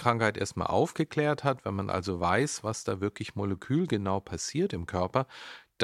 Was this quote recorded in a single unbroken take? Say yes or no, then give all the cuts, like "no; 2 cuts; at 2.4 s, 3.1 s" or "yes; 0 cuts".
yes; 0 cuts